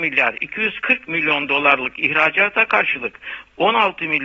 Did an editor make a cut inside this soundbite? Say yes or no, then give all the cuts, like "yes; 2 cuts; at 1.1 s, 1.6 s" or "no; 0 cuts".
no; 0 cuts